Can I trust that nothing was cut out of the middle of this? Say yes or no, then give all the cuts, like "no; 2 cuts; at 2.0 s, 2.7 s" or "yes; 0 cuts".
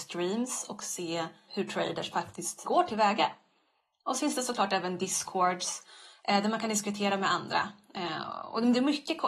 no; 2 cuts; at 1.5 s, 2.6 s